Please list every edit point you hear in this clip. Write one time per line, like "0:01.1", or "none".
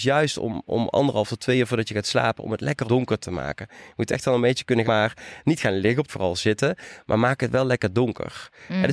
0:02.8
0:04.8
0:06.1